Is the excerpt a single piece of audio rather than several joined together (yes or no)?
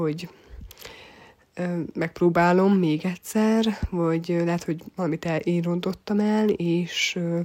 yes